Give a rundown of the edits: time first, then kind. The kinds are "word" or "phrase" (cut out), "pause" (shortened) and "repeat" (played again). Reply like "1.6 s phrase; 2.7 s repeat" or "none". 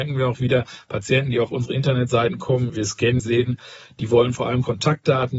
2.7 s word; 3.2 s word